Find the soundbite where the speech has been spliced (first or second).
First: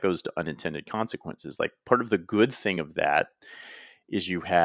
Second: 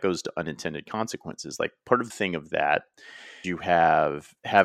second